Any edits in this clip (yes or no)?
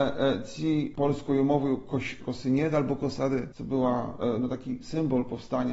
yes